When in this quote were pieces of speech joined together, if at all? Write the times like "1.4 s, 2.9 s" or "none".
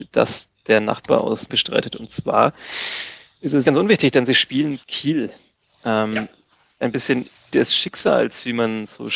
1.5 s, 3.6 s, 4.8 s, 6.8 s, 7.5 s